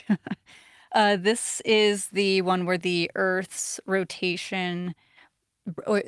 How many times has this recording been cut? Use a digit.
0